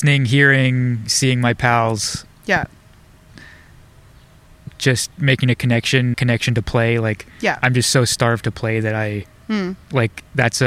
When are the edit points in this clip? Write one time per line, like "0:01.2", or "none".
0:06.1
0:09.4